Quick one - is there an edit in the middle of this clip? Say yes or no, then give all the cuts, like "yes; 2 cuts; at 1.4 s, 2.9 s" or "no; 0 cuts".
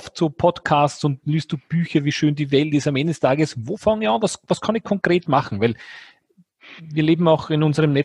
no; 0 cuts